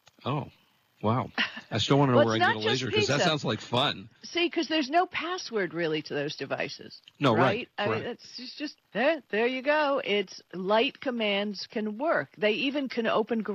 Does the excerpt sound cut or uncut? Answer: cut